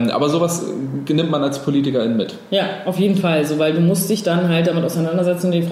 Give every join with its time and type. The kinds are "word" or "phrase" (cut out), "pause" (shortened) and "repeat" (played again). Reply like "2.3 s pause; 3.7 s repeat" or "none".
none